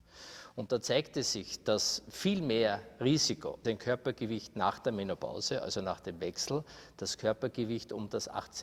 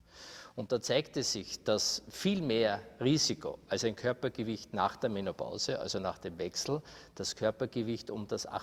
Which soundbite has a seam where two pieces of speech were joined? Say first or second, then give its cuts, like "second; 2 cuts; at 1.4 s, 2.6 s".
first; 1 cut; at 3.6 s